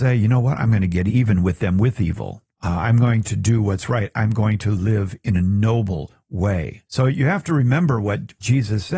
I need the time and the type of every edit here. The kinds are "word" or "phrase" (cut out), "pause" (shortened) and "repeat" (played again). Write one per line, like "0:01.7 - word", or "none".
0:02.5 - pause
0:06.9 - pause